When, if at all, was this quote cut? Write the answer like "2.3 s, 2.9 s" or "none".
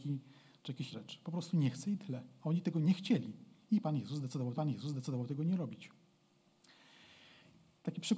0.9 s, 4.6 s